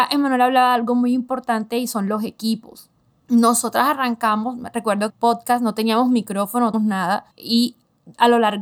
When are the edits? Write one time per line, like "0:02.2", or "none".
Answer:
0:03.1
0:05.1
0:06.7
0:07.3